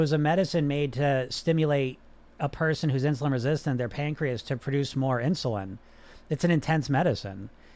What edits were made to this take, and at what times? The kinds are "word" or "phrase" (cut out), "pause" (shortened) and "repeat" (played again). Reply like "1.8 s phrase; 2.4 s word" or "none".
none

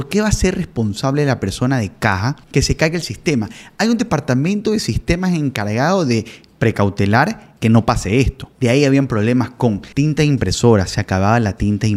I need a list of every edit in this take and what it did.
2.4 s pause; 7.6 s pause; 8.5 s pause; 9.9 s pause

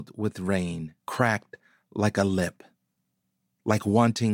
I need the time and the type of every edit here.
1.0 s pause

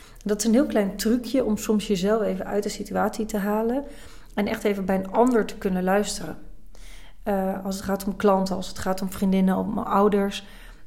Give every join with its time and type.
none

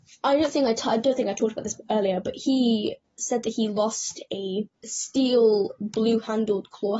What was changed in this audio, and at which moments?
4.7 s pause

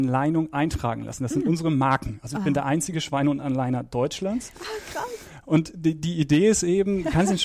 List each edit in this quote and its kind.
none

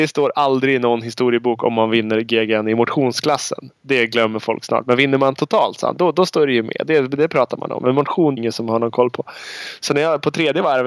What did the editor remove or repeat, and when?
8.4 s phrase

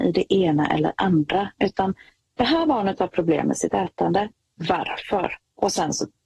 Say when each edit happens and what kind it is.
none

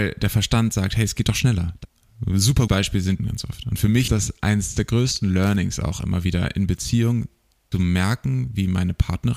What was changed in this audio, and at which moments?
2.7 s word; 3.2 s word; 4.1 s word; 7.7 s word

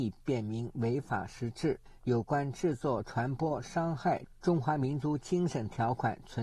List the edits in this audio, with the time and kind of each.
none

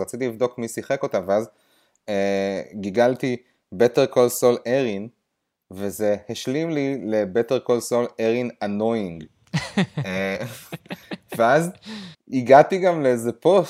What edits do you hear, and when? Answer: none

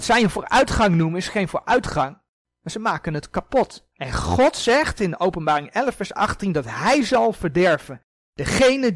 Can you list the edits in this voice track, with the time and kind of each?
3.9 s pause

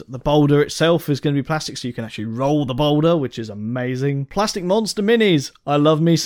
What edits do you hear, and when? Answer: none

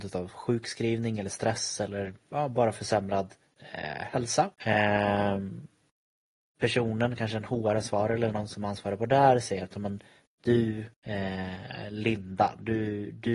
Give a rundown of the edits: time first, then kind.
4.5 s pause; 10.9 s pause

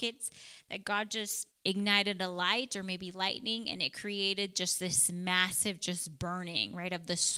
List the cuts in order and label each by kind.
1.5 s pause

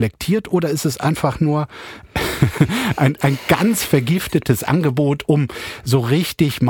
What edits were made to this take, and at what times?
none

